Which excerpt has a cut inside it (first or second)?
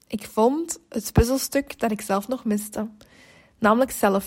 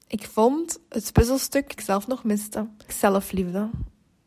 second